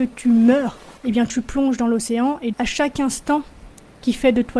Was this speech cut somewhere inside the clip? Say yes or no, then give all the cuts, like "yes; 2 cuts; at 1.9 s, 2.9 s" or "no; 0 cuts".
yes; 2 cuts; at 1.0 s, 2.5 s